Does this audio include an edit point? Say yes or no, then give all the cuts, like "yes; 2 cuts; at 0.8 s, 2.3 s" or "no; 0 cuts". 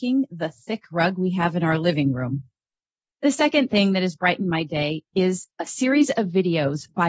no; 0 cuts